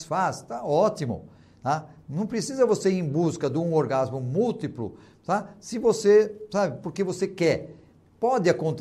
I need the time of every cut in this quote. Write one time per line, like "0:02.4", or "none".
none